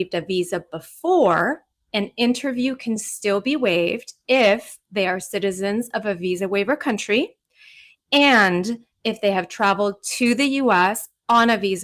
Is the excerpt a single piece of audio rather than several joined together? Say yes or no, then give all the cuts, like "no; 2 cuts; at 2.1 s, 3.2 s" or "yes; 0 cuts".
yes; 0 cuts